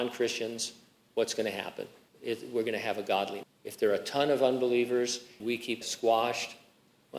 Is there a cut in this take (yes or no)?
yes